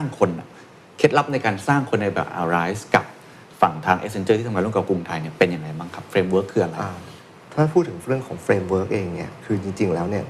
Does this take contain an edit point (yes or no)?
no